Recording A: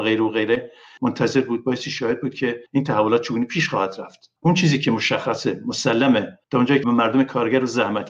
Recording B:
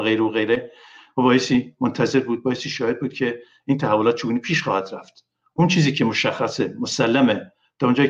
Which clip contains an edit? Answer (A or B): A